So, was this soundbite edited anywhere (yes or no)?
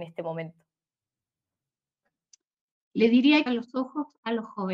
yes